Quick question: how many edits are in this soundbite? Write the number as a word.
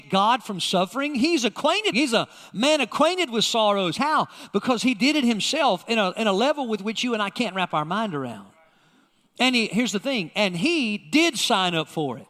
one